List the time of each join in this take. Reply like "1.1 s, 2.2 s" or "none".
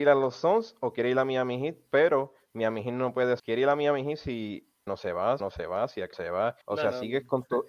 3.4 s, 4.9 s, 5.4 s, 6.1 s, 6.6 s